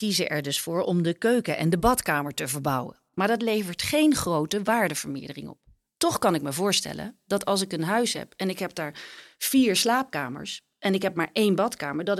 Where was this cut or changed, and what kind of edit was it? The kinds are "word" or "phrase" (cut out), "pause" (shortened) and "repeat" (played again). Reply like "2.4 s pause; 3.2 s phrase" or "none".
none

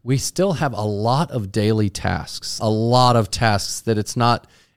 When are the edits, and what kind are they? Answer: 2.6 s word

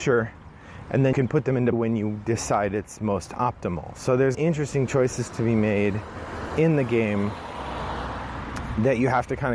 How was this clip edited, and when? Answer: 1.1 s word; 1.7 s word; 4.3 s phrase

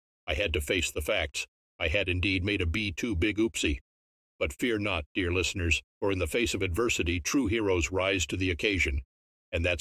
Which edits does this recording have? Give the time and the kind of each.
5.9 s pause

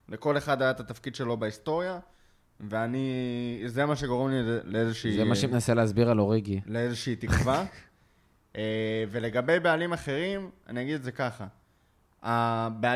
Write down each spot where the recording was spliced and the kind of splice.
none

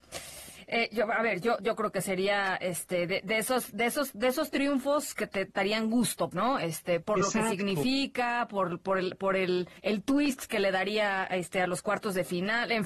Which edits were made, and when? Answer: 1.6 s word; 6.3 s word; 7.0 s word; 9.8 s pause

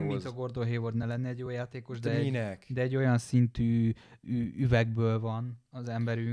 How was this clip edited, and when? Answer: none

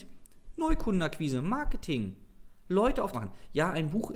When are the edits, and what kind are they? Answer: 3.1 s phrase

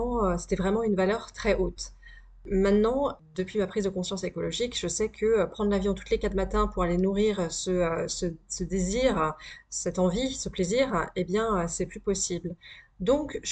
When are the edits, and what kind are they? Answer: none

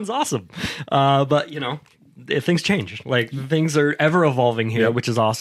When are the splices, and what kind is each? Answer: none

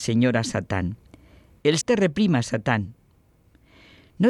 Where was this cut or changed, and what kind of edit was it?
1.8 s word

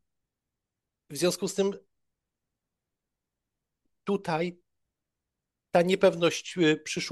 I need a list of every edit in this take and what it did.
none

